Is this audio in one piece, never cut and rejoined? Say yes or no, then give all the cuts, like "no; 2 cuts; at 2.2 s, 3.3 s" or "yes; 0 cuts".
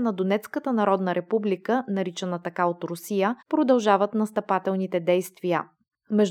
no; 1 cut; at 3.4 s